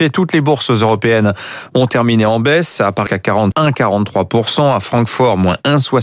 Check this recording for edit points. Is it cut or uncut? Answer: cut